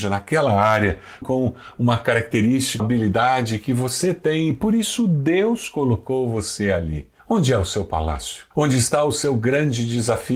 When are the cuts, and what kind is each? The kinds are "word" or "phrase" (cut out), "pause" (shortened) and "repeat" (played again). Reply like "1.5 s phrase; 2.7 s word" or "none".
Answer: 1.2 s word; 2.8 s word; 7.2 s pause; 8.5 s pause

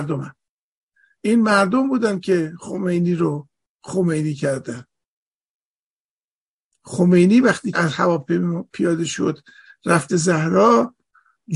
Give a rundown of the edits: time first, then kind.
7.7 s word; 10.1 s word

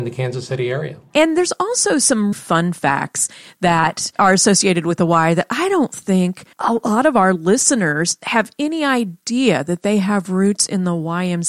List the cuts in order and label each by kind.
2.3 s word; 6.5 s pause

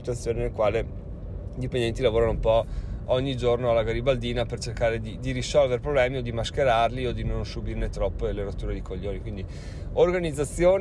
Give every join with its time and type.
none

